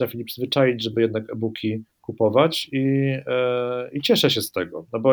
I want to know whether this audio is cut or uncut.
uncut